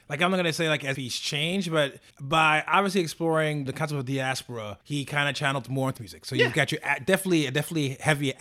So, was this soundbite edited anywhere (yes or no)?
yes